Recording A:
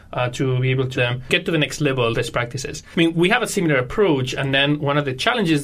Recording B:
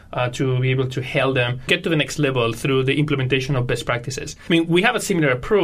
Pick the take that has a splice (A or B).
A